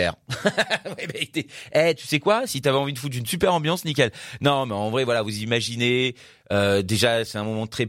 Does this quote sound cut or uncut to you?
uncut